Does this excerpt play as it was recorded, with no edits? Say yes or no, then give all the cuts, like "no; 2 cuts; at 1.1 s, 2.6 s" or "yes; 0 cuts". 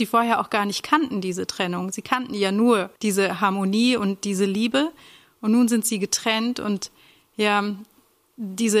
no; 1 cut; at 3.0 s